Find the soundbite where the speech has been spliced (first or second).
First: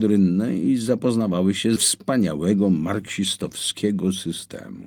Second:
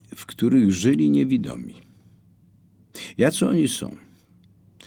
first